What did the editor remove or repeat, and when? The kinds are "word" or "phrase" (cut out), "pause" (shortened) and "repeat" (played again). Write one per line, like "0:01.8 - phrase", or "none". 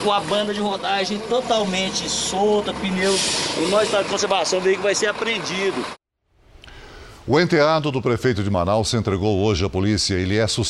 none